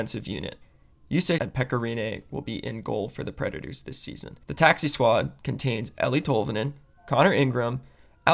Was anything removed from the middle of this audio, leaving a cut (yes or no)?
yes